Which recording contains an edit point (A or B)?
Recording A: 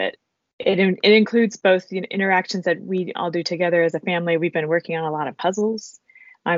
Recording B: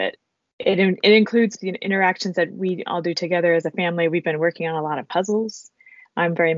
B